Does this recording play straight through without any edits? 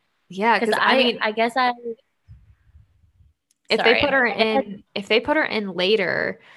no; 1 cut; at 4.9 s

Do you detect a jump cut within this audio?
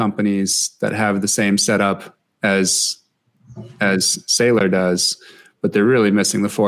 no; 0 cuts

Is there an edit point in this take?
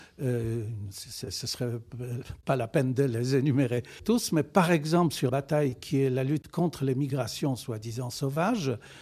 yes; 2 cuts; at 4.0 s, 5.3 s

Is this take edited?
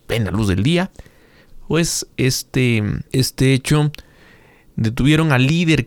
yes; 2 cuts; at 2.1 s, 3.1 s

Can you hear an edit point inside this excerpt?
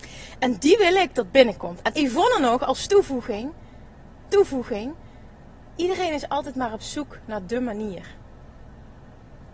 yes; 2 cuts; at 2.0 s, 4.3 s

